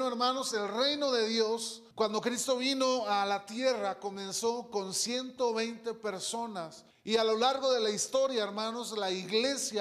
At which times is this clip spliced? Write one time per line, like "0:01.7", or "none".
0:01.9
0:06.9